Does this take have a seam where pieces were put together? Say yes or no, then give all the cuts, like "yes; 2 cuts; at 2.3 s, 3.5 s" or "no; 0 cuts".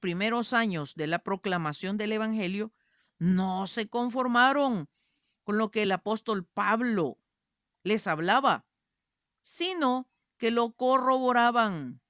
no; 0 cuts